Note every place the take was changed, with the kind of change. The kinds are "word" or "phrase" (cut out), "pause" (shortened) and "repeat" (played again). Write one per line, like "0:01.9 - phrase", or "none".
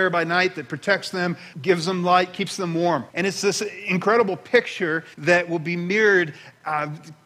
0:01.5 - pause
0:03.1 - pause
0:05.1 - pause